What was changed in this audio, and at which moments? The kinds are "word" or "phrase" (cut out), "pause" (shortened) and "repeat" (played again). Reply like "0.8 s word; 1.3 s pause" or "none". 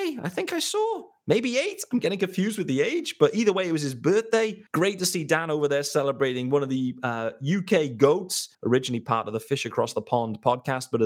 4.7 s pause; 8.5 s pause